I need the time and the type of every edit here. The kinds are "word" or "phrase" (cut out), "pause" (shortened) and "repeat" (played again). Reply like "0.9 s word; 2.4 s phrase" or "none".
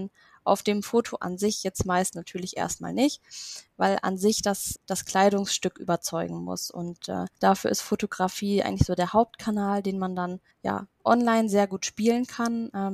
4.8 s word; 7.4 s pause; 10.5 s pause